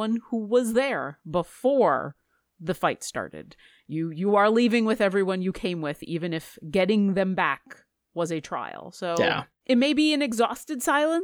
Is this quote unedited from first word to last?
yes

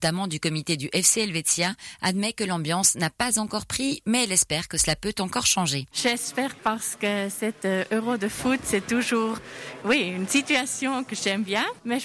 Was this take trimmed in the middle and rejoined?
yes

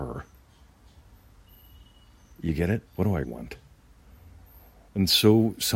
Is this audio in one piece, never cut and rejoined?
no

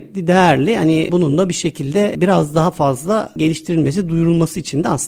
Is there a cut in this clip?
no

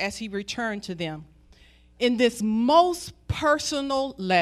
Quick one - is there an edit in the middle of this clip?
no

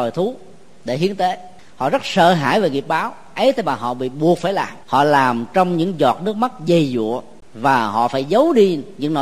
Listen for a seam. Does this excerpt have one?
yes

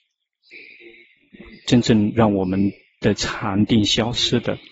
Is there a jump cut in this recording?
no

